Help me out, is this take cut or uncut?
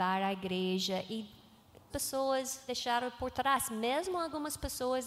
cut